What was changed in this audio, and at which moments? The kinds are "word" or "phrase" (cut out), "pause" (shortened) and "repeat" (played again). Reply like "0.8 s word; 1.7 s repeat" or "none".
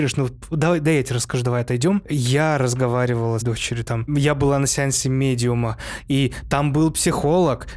3.4 s phrase; 4.1 s word